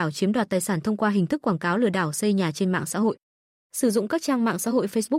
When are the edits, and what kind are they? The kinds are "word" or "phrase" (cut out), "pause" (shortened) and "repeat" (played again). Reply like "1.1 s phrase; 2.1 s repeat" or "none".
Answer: none